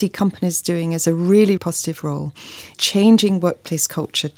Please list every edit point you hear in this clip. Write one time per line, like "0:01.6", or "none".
0:01.6
0:02.7